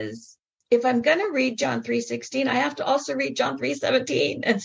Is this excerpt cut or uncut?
uncut